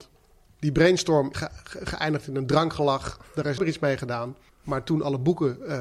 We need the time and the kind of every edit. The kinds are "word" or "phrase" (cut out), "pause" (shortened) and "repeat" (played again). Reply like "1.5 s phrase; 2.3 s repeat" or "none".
1.3 s phrase; 3.6 s word; 4.5 s pause